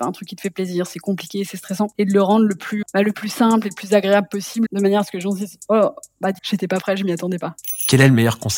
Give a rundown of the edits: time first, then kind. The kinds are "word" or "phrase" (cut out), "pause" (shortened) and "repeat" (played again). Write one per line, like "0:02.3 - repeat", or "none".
0:02.8 - word
0:04.7 - word
0:06.4 - word